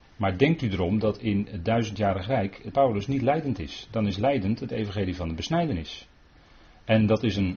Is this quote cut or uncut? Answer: cut